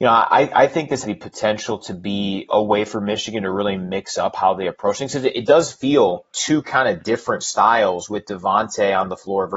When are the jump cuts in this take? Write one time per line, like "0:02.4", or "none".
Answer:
0:01.0
0:02.5
0:06.3